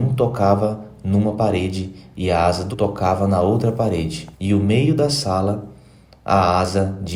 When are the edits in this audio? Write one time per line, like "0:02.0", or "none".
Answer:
0:02.7
0:04.3